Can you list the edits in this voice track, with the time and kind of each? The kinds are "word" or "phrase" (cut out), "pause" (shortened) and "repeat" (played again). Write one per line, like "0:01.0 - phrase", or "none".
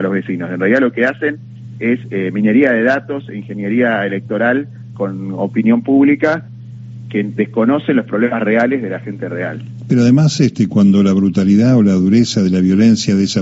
0:04.9 - word